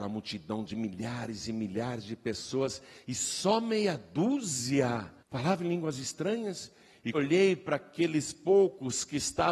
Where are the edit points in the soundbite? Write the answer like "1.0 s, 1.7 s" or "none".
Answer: 5.2 s, 7.1 s